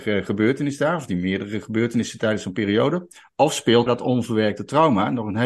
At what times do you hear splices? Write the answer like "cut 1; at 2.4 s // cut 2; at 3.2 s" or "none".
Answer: cut 1; at 3.9 s